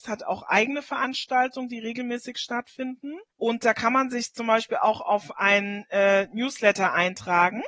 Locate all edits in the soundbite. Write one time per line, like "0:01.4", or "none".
0:03.3

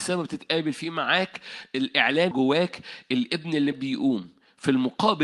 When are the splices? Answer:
0:02.3
0:03.7

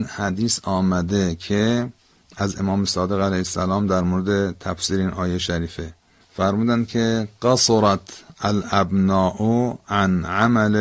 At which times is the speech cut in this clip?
none

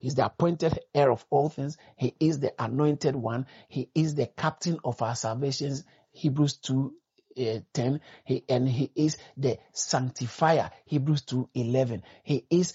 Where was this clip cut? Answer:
none

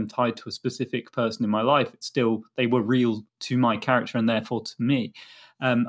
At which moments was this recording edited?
0:03.3

